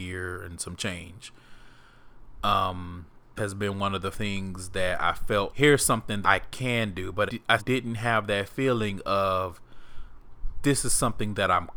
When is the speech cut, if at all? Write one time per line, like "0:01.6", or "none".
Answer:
0:03.4
0:04.1
0:05.5
0:06.2
0:07.3
0:07.6